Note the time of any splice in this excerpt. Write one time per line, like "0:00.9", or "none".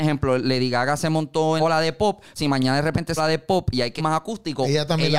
0:01.6
0:02.4
0:03.2
0:04.0